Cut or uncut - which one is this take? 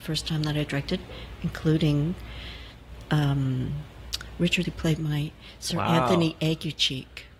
cut